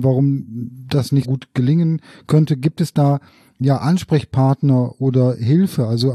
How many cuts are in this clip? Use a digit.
1